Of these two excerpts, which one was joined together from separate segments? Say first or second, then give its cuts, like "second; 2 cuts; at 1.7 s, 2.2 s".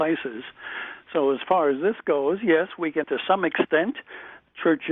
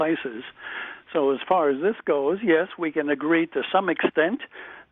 first; 1 cut; at 3.0 s